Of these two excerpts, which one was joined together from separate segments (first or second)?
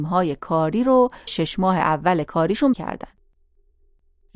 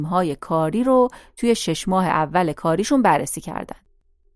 first